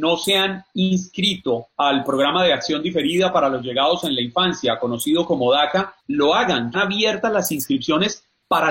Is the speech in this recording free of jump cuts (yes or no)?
no